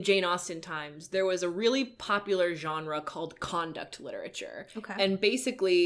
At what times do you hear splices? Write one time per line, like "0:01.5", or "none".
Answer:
none